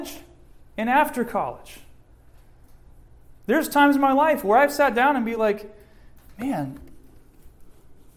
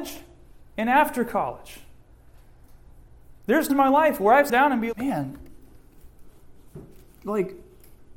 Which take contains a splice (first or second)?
second